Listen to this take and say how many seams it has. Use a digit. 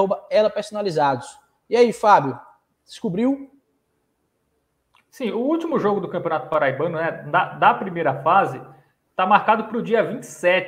0